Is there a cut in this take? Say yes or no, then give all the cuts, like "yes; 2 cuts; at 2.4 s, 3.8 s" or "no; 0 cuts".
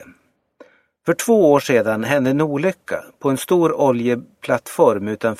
no; 0 cuts